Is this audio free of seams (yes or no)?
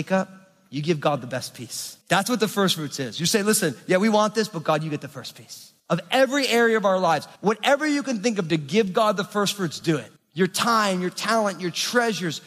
no